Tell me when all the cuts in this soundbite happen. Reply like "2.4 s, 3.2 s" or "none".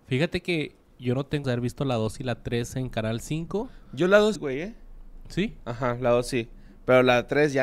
1.4 s, 4.3 s